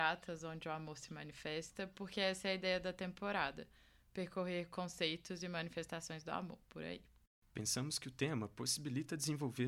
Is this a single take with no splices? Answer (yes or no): yes